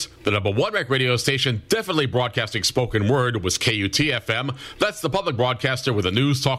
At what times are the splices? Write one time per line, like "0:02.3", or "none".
none